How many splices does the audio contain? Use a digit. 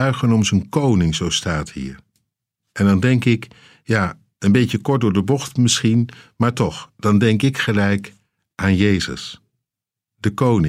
0